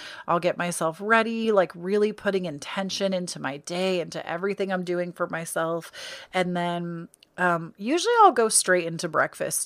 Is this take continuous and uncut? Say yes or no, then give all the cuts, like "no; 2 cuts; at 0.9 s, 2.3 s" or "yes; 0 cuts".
yes; 0 cuts